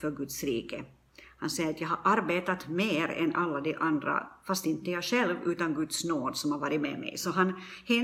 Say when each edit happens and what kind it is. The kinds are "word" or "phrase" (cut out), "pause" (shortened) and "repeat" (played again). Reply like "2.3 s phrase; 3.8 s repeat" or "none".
none